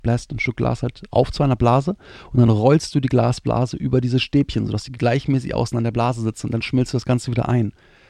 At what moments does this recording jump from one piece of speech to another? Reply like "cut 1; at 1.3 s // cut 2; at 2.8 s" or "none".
none